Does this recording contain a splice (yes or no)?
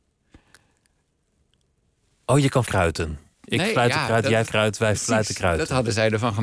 yes